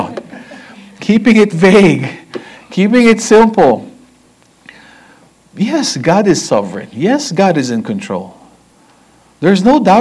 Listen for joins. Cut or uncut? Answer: uncut